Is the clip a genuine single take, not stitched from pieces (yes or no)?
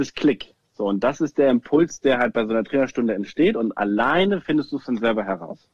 yes